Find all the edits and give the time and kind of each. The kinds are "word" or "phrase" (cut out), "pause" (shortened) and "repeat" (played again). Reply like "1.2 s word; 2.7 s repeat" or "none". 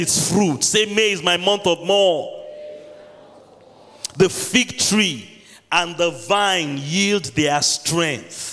none